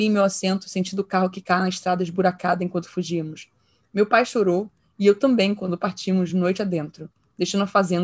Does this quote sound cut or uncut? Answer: uncut